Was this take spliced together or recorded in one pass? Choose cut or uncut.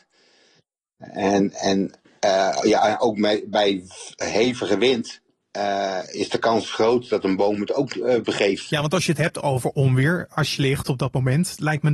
cut